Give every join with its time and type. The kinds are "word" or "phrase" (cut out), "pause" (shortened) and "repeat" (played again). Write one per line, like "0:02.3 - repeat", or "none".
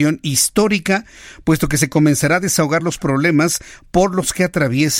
none